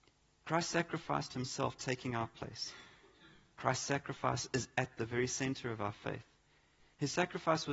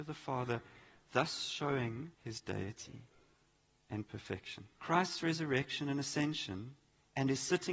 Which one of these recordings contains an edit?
second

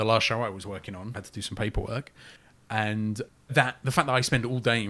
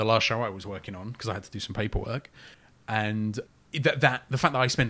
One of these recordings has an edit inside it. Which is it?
first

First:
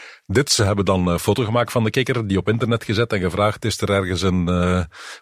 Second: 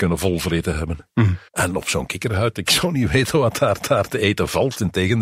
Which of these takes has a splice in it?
second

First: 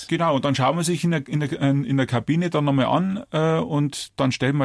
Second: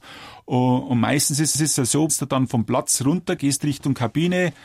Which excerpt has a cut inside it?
second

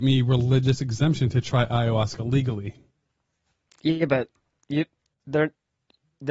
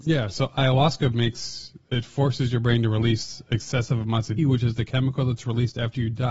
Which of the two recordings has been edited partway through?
second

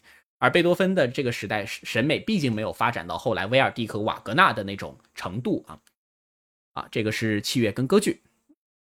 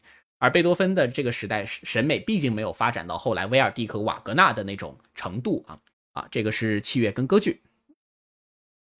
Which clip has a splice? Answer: second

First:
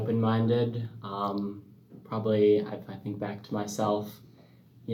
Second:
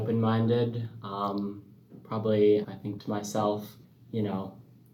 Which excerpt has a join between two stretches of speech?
second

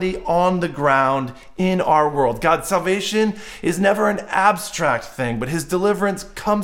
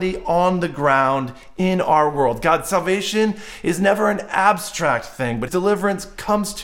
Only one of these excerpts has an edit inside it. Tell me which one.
second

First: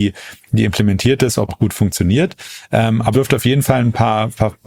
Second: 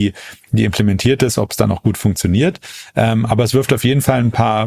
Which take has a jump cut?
first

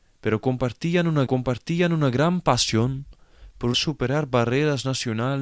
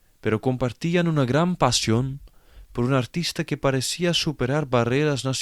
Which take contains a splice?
first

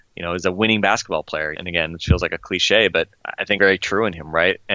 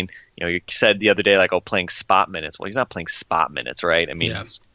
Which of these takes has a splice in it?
first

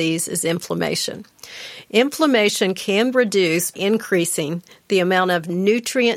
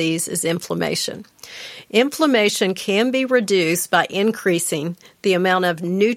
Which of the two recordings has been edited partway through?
first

